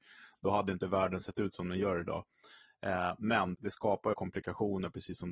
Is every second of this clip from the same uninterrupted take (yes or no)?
no